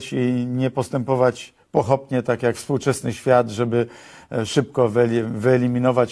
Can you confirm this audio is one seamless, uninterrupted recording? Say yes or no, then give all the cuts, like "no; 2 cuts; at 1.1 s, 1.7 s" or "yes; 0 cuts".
yes; 0 cuts